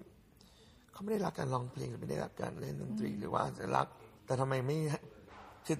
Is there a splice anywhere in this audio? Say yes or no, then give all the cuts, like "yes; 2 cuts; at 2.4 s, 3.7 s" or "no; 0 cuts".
yes; 1 cut; at 4.2 s